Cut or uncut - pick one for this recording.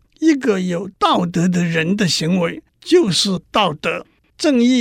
cut